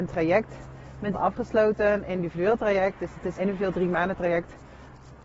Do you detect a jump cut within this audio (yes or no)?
yes